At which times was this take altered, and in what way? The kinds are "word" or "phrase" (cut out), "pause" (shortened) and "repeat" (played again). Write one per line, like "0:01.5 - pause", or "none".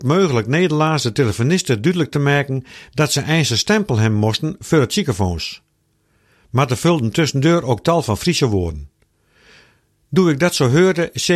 none